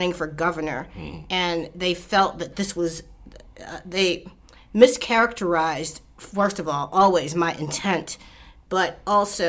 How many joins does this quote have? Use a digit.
0